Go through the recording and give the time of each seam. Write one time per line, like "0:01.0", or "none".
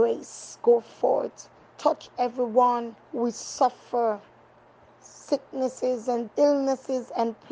0:01.7
0:03.0
0:06.3

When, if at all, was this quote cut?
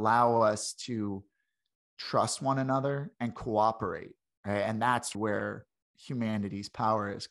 0:05.1

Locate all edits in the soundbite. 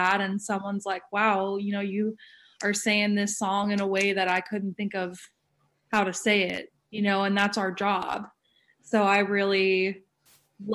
none

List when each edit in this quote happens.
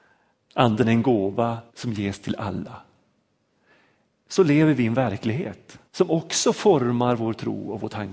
0:01.7
0:05.9

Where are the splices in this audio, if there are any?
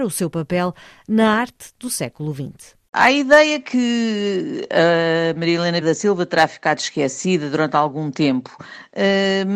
0:05.8

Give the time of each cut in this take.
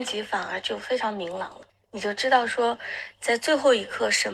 0:01.7

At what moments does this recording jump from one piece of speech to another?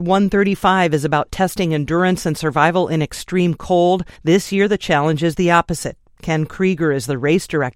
0:04.1

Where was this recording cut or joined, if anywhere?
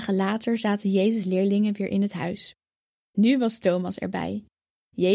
none

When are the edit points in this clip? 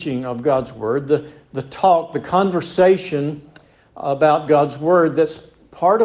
none

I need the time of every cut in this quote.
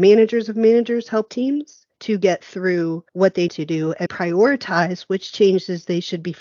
0:01.3
0:01.9
0:03.1
0:03.5
0:04.1

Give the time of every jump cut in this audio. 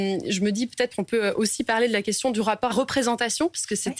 0:02.7

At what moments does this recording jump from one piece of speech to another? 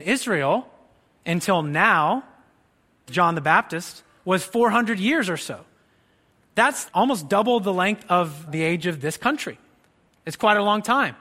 0:03.1
0:06.9
0:08.5

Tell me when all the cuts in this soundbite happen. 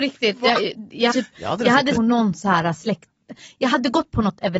0:01.1
0:02.0

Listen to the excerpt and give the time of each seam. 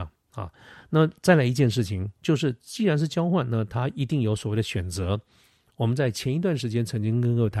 none

